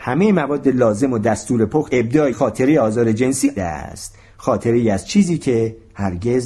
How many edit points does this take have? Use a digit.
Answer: 3